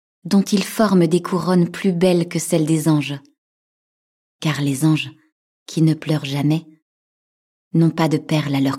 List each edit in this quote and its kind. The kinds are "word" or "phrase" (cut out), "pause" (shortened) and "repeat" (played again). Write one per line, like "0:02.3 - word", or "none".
none

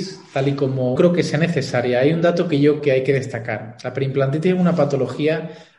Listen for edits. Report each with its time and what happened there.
0:01.0 - phrase
0:02.8 - word

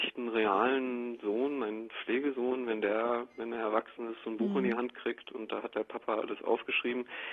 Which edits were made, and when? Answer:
none

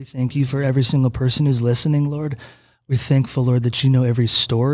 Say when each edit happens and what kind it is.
none

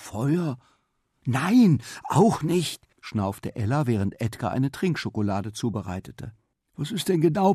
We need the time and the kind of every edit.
0:02.9 - pause
0:06.5 - pause

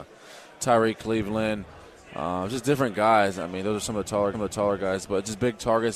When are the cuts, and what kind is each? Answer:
0:04.3 - repeat

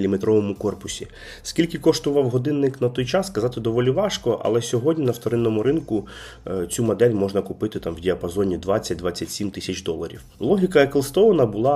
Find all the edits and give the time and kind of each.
none

